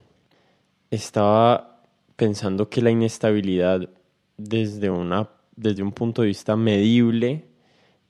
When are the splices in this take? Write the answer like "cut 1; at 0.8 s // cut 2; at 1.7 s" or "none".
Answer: none